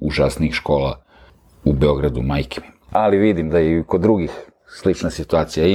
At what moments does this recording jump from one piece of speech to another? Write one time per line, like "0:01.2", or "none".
none